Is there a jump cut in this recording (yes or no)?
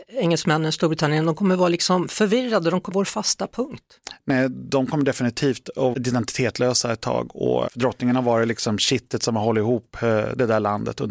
yes